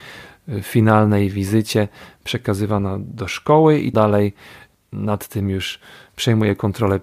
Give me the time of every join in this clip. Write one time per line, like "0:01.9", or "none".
0:03.9